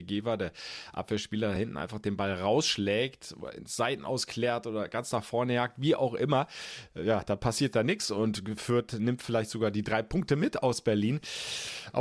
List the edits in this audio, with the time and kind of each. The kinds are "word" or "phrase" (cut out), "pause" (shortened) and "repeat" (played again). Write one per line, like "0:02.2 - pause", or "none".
none